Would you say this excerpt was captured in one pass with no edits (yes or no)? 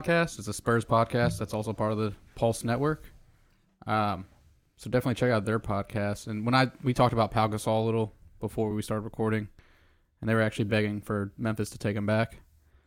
yes